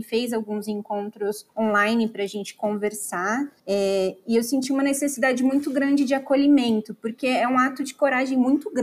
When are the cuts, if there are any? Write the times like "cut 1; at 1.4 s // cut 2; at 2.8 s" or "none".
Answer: cut 1; at 1.5 s // cut 2; at 3.6 s

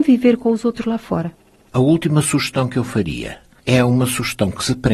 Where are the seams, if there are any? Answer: none

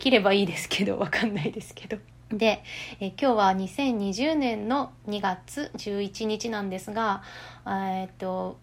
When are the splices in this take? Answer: cut 1; at 2.1 s

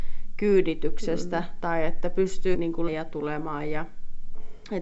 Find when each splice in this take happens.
cut 1; at 2.5 s // cut 2; at 2.9 s

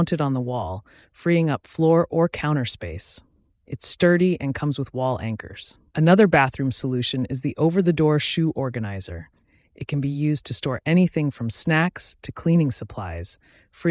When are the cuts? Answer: cut 1; at 5.9 s

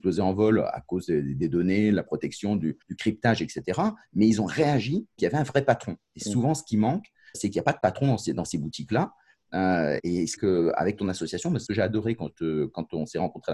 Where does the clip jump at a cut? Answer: cut 1; at 2.8 s // cut 2; at 5.2 s // cut 3; at 7.3 s // cut 4; at 10.0 s // cut 5; at 10.4 s // cut 6; at 11.7 s

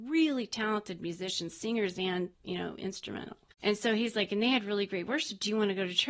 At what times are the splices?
cut 1; at 2.3 s // cut 2; at 3.5 s

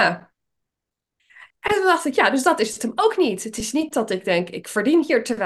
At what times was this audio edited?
cut 1; at 1.5 s

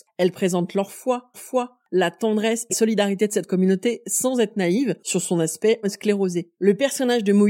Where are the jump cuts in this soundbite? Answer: cut 1; at 1.3 s // cut 2; at 2.7 s // cut 3; at 5.8 s // cut 4; at 6.5 s

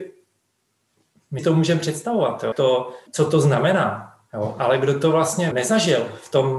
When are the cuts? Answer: cut 1; at 1.4 s // cut 2; at 2.5 s // cut 3; at 3.1 s // cut 4; at 5.5 s

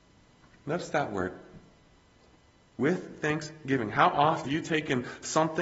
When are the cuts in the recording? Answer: cut 1; at 2.4 s // cut 2; at 4.4 s

